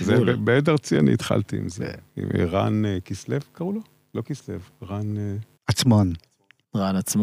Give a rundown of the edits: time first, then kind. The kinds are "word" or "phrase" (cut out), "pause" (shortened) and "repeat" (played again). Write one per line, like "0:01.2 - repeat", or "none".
0:05.6 - pause